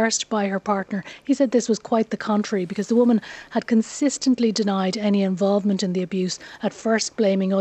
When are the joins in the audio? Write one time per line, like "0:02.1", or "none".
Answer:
none